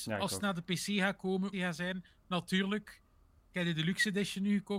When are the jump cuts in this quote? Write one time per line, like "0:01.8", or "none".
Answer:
0:01.5
0:03.4